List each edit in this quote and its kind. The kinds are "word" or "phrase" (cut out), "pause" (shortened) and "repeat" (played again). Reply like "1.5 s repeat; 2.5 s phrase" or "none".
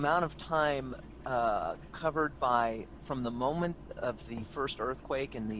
none